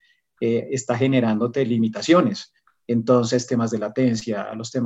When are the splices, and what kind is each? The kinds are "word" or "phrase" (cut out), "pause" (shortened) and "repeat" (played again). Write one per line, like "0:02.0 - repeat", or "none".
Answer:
none